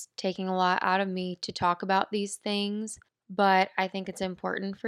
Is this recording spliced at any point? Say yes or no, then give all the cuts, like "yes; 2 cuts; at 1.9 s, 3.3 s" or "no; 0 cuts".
yes; 1 cut; at 3.1 s